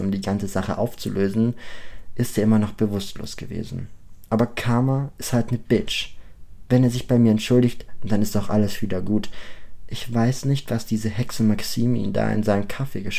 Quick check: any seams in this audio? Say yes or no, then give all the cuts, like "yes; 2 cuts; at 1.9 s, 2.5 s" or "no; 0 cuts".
no; 0 cuts